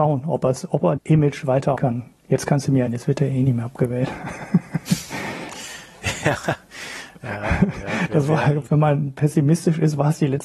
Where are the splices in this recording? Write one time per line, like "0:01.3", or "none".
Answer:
0:01.0
0:01.8
0:02.9
0:08.7